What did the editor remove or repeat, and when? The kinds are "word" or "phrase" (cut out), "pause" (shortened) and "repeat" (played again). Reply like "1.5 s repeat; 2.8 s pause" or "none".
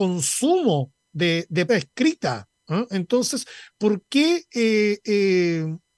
1.7 s word

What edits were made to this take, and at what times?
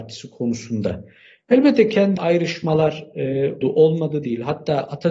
2.2 s word; 3.6 s word

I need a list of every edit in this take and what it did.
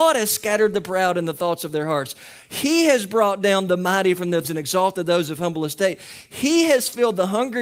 4.4 s word

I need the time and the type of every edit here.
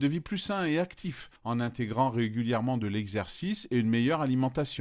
1.4 s pause

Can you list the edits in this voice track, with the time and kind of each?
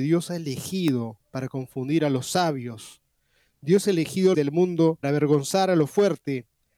4.3 s phrase; 5.0 s word

